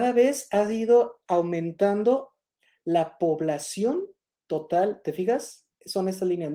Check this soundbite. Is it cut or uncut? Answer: uncut